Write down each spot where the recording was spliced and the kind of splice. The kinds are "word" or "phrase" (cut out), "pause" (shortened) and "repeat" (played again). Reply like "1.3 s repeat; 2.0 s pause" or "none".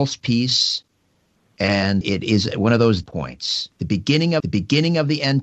2.0 s word; 3.0 s word; 3.7 s pause; 4.4 s repeat

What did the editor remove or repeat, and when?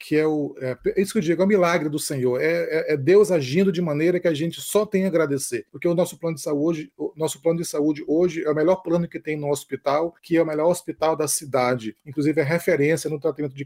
none

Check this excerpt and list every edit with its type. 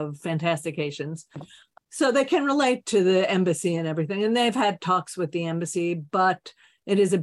none

